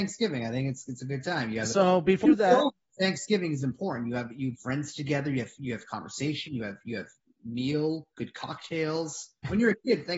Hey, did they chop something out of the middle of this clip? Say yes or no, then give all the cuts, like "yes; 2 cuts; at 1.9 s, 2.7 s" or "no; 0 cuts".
yes; 3 cuts; at 2.2 s, 4.5 s, 8.1 s